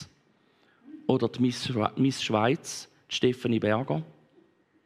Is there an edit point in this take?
no; 0 cuts

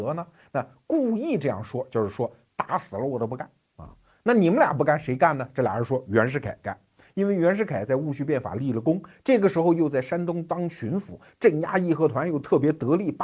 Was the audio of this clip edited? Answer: no; 0 cuts

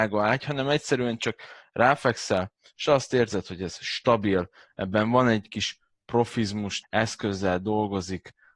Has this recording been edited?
yes; 1 cut; at 6.8 s

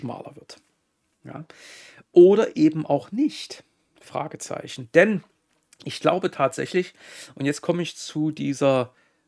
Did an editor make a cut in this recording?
no; 0 cuts

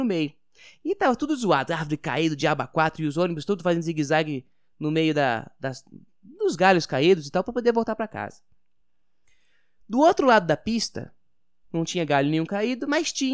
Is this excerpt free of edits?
yes; 0 cuts

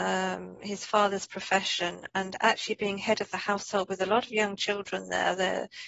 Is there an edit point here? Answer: no; 0 cuts

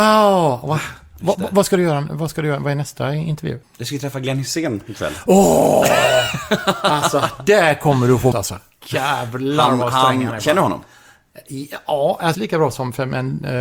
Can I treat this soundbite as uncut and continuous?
no; 4 cuts; at 1.3 s, 3.6 s, 8.3 s, 12.3 s

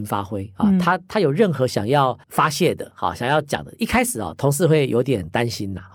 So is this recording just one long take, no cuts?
no; 1 cut; at 2.2 s

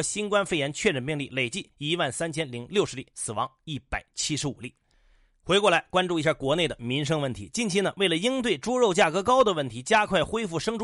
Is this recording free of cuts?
yes; 0 cuts

